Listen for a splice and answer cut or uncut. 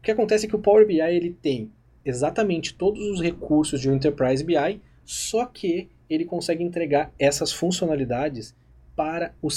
uncut